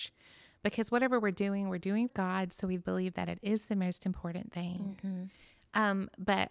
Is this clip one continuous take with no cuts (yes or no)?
no